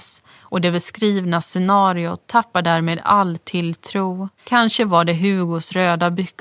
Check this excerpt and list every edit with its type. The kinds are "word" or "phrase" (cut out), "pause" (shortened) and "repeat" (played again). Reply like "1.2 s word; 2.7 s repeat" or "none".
4.4 s pause